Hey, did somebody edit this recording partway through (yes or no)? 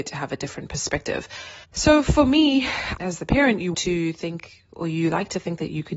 yes